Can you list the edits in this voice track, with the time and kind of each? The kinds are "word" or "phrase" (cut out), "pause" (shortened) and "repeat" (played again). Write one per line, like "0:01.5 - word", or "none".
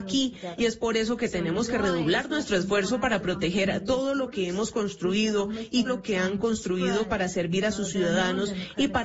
0:05.8 - word

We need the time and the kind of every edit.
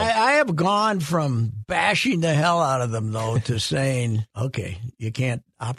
0:04.3 - pause

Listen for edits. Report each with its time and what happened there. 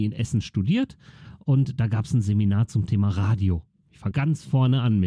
0:04.1 - word

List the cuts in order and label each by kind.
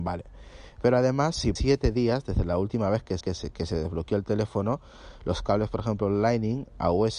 0:01.6 - word
0:03.2 - repeat

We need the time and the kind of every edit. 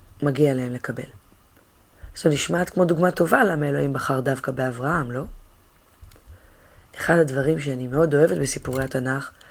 none

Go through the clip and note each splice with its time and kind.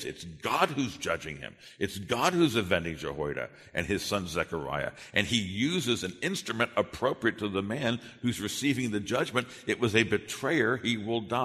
none

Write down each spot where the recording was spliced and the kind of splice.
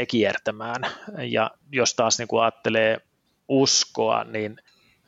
0:01.6 - pause

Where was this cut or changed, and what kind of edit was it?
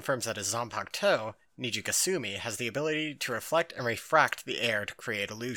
none

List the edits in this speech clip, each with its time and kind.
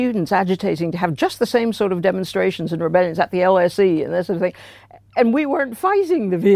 none

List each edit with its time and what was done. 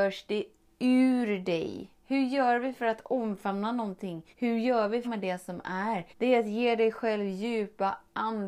0:02.0 - pause
0:04.3 - pause
0:05.0 - phrase
0:06.1 - pause

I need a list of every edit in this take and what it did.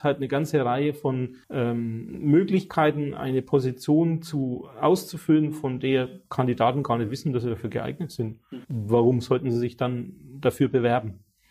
0:01.4 - pause
0:08.6 - pause

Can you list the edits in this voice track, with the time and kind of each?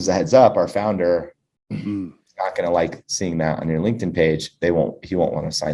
none

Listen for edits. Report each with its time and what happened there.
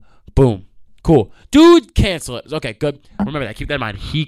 0:01.4 - pause

